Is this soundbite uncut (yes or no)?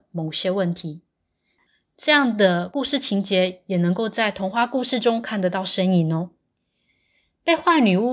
yes